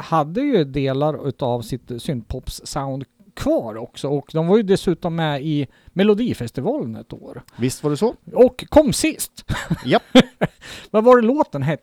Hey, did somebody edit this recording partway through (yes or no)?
no